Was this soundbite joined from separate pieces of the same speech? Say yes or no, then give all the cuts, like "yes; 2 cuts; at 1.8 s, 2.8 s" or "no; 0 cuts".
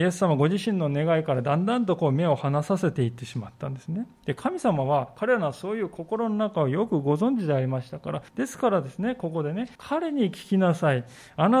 yes; 2 cuts; at 8.3 s, 9.7 s